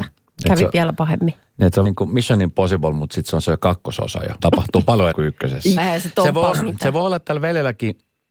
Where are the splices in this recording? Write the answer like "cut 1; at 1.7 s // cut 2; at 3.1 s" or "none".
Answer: cut 1; at 1.8 s // cut 2; at 4.4 s // cut 3; at 5.1 s // cut 4; at 5.8 s // cut 5; at 6.5 s

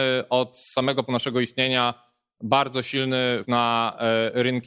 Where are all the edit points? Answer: cut 1; at 1.0 s // cut 2; at 3.4 s

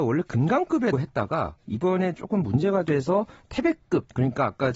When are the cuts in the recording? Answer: cut 1; at 0.9 s

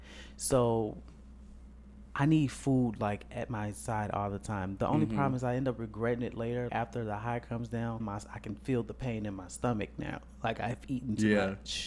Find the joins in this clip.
cut 1; at 6.7 s // cut 2; at 8.0 s

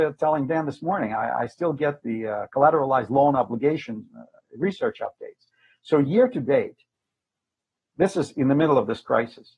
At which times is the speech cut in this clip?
none

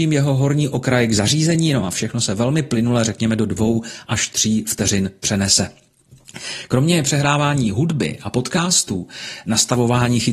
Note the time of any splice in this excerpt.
none

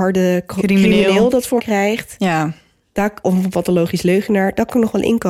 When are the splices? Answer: cut 1; at 1.6 s // cut 2; at 3.2 s

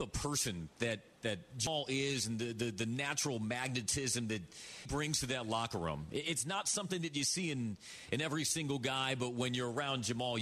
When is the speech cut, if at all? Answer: cut 1; at 4.9 s

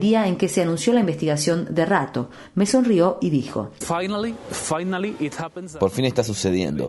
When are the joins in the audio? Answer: none

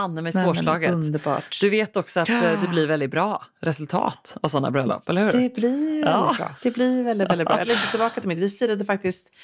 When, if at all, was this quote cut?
cut 1; at 6.6 s // cut 2; at 7.6 s

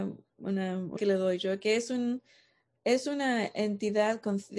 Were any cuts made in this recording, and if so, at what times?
cut 1; at 1.0 s

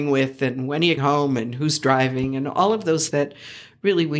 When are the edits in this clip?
cut 1; at 1.0 s // cut 2; at 3.1 s

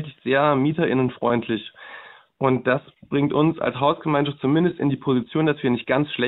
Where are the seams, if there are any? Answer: none

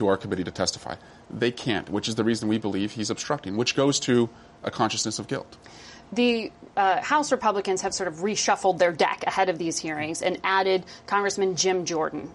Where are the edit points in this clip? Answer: none

